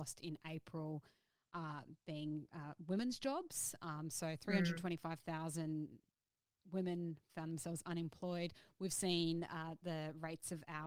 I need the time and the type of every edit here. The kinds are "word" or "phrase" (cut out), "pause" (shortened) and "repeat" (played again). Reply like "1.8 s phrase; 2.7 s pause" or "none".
none